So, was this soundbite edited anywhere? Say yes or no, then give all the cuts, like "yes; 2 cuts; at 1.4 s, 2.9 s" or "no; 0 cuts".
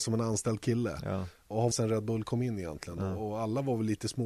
yes; 1 cut; at 1.7 s